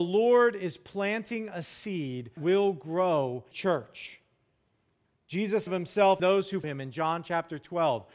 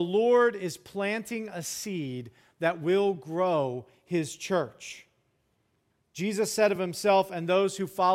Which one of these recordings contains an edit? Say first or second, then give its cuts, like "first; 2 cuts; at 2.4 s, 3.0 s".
first; 5 cuts; at 2.4 s, 3.5 s, 5.7 s, 6.2 s, 6.6 s